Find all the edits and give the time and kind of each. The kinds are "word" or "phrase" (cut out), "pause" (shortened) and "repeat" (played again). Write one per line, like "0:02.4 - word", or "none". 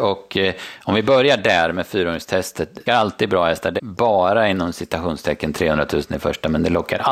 0:02.9 - phrase
0:03.8 - word